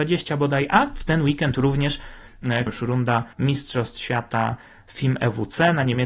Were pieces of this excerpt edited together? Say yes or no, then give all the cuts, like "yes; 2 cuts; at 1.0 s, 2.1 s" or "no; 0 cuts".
yes; 2 cuts; at 2.7 s, 3.3 s